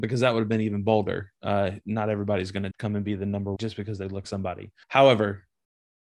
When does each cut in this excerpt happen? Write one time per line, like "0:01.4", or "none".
0:02.7
0:03.6
0:04.2
0:04.8